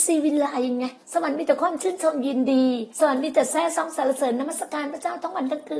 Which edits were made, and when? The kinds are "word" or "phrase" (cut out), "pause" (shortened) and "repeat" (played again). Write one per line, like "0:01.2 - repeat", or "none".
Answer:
0:01.0 - pause
0:02.9 - pause